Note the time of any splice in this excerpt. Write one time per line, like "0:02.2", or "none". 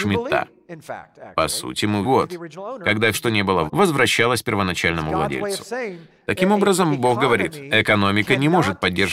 0:02.0
0:03.1
0:03.7